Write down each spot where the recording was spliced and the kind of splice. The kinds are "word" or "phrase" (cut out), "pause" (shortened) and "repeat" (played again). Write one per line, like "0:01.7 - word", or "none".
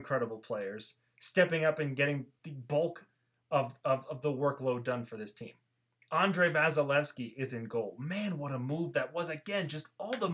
none